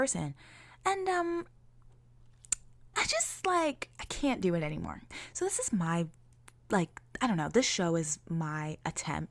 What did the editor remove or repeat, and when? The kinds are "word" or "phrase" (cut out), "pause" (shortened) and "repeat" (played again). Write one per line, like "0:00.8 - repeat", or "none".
0:02.9 - word